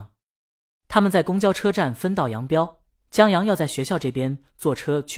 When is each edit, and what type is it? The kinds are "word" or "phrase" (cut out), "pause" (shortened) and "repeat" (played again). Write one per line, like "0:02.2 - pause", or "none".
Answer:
none